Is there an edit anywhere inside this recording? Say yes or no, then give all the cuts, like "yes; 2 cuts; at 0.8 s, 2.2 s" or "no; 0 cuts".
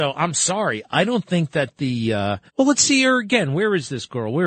yes; 1 cut; at 2.5 s